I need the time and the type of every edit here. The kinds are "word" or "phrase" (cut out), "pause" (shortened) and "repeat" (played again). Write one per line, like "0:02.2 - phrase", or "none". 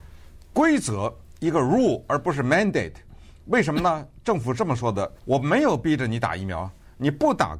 0:05.2 - pause